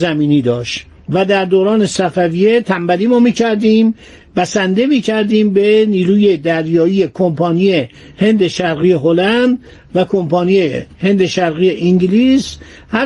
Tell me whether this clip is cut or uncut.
uncut